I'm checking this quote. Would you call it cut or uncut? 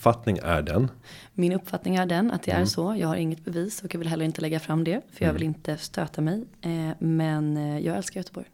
uncut